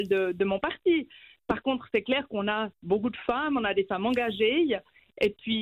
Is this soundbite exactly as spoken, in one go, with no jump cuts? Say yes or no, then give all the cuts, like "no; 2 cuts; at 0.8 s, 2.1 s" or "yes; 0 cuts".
yes; 0 cuts